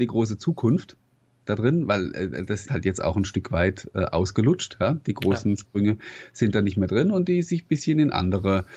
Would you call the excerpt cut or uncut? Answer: cut